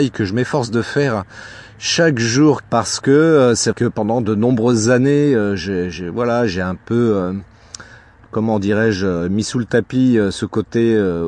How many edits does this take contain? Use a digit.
2